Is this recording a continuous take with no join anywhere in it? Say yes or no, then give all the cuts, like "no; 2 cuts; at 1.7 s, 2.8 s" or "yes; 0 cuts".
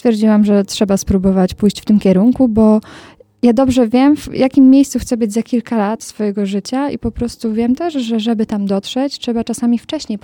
yes; 0 cuts